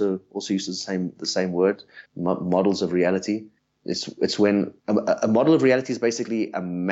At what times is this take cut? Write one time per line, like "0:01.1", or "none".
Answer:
0:02.1
0:03.6
0:04.8